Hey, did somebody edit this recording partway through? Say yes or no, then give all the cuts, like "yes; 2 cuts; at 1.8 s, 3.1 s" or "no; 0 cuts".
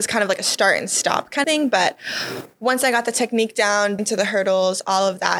yes; 2 cuts; at 1.4 s, 4.0 s